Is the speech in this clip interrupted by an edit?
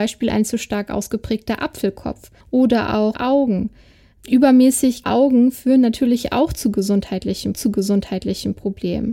yes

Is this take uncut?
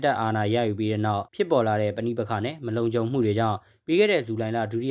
no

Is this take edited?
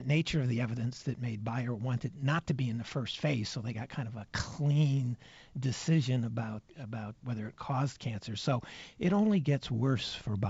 yes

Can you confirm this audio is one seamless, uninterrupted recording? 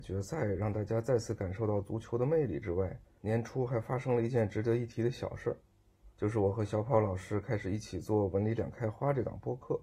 no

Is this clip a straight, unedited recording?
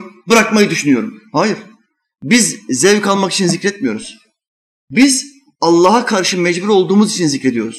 yes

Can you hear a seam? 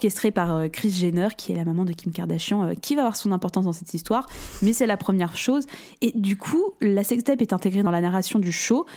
no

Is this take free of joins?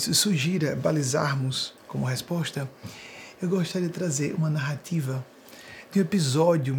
no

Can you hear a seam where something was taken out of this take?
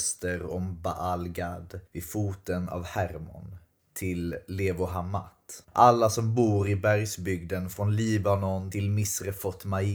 yes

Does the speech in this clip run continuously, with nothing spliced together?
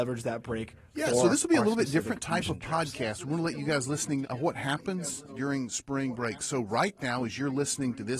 no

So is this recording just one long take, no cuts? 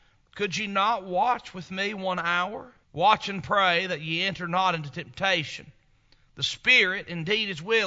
no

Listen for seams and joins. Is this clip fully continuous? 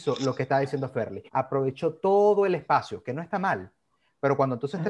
no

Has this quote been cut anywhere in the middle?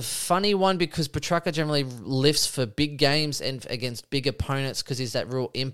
no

